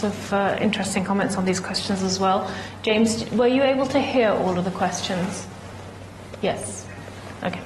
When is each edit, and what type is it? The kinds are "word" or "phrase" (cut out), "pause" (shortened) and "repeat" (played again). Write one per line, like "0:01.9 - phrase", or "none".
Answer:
none